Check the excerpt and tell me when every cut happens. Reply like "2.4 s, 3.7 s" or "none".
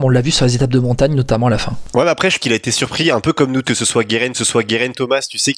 2.4 s, 3.6 s, 4.3 s